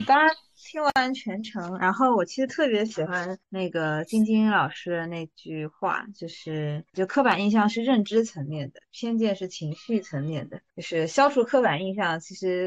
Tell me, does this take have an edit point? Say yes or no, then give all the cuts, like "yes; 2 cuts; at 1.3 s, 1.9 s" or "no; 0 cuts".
yes; 3 cuts; at 3.4 s, 6.9 s, 10.7 s